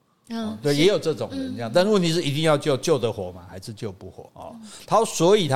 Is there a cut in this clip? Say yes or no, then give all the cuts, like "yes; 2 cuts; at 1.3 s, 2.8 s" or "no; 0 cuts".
yes; 1 cut; at 4.3 s